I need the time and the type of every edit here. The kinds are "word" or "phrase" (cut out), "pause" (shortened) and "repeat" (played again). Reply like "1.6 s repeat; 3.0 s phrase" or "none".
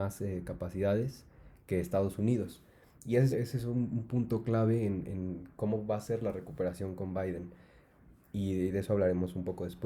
3.3 s word